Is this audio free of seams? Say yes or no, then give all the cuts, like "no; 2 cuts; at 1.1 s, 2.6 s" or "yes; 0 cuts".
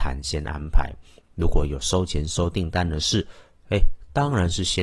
yes; 0 cuts